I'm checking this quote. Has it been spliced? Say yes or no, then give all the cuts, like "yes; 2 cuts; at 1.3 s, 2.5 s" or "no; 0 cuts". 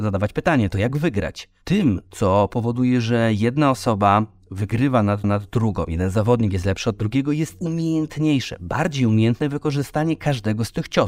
yes; 1 cut; at 5.2 s